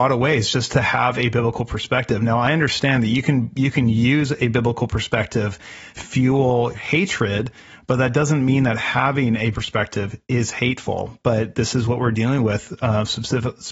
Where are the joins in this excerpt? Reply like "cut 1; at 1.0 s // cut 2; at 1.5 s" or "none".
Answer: cut 1; at 6.0 s // cut 2; at 6.7 s // cut 3; at 9.5 s